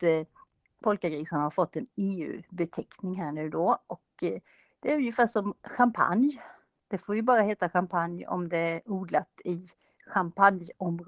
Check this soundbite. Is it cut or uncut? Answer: uncut